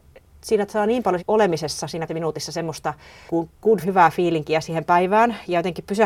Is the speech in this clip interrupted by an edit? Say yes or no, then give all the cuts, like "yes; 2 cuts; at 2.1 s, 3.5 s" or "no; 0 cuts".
yes; 4 cuts; at 1.2 s, 2.1 s, 3.3 s, 3.8 s